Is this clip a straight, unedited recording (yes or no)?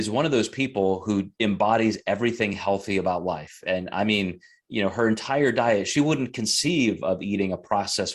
yes